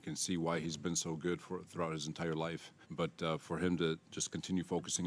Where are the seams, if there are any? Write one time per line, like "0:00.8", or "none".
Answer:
0:02.8